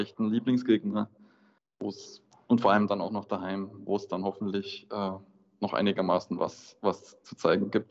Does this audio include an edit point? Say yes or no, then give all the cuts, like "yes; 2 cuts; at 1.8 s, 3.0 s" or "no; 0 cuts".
no; 0 cuts